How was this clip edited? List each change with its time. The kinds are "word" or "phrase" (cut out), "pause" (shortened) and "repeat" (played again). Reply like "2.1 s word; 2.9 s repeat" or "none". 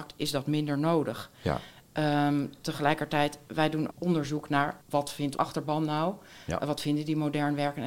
3.9 s phrase; 4.8 s pause; 5.4 s word